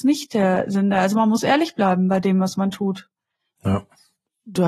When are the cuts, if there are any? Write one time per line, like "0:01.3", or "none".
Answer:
none

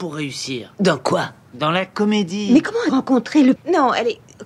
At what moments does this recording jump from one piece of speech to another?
0:02.9
0:03.6

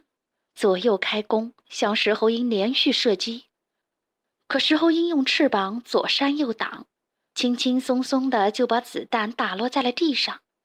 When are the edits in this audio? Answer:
none

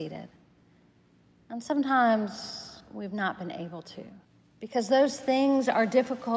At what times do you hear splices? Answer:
0:02.8
0:04.2

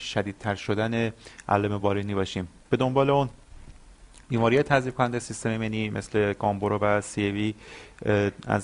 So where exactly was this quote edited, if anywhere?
none

